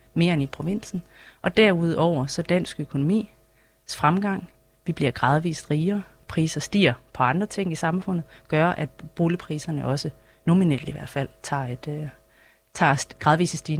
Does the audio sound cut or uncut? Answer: uncut